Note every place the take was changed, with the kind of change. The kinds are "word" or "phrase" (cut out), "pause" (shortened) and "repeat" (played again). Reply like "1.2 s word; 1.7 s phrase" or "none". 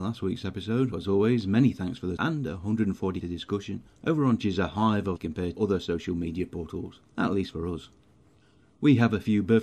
0.9 s word; 2.2 s word; 3.2 s word; 4.4 s phrase; 5.2 s word; 5.5 s word; 7.1 s pause

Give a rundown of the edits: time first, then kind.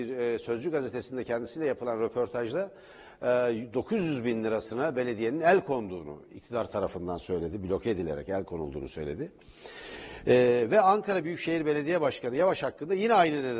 none

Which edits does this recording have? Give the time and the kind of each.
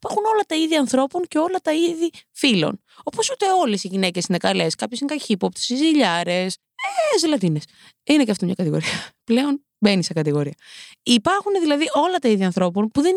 none

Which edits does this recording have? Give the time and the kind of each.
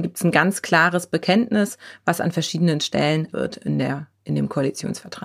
3.3 s word

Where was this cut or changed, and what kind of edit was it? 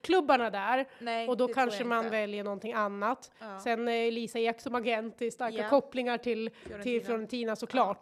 none

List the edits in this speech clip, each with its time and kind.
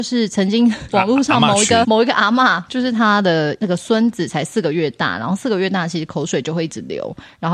1.8 s word

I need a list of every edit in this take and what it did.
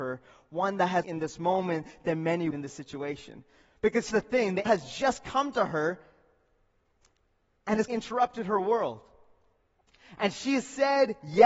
1.0 s phrase; 2.5 s word; 4.1 s word; 4.7 s word; 7.9 s word

